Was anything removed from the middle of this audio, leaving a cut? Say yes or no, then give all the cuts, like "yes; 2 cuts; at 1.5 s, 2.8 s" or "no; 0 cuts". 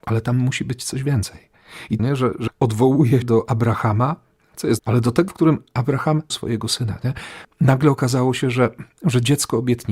yes; 6 cuts; at 2.0 s, 2.5 s, 3.2 s, 4.8 s, 5.3 s, 6.3 s